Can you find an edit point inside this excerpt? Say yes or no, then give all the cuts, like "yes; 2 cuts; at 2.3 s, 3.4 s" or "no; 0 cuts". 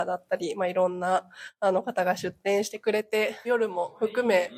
yes; 1 cut; at 3.4 s